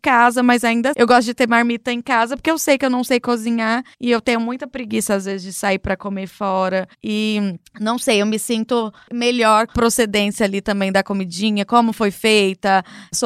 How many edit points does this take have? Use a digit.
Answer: 4